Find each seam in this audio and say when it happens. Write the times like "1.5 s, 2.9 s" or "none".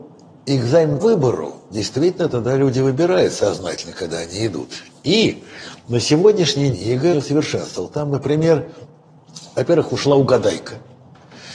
1.0 s, 1.7 s, 6.7 s, 7.1 s

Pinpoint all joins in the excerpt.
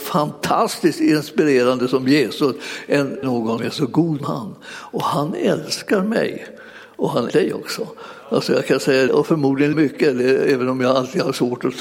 3.2 s, 3.6 s, 4.2 s, 7.3 s, 9.1 s, 9.7 s

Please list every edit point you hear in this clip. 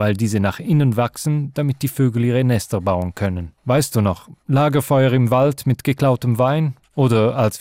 3.6 s

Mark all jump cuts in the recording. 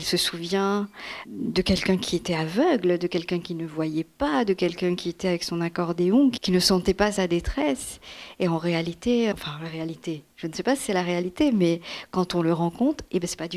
1.3 s, 6.4 s, 9.3 s, 10.3 s

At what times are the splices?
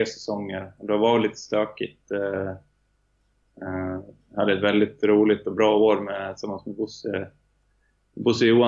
none

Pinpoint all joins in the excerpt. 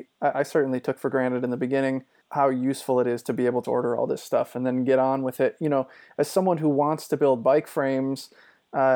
2.2 s, 3.6 s

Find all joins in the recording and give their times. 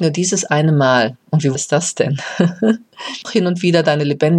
1.5 s, 3.2 s

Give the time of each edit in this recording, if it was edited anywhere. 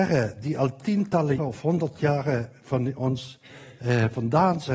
1.4 s

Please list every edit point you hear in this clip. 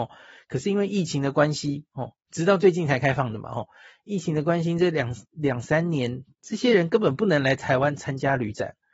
6.3 s

